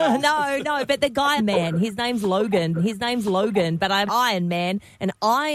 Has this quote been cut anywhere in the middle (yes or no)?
yes